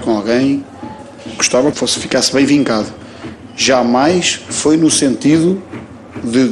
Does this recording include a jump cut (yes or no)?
yes